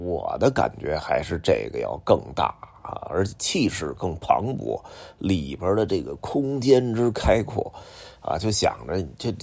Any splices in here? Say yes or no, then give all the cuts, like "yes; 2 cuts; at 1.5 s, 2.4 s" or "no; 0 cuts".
no; 0 cuts